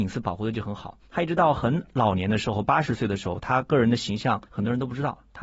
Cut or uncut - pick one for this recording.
cut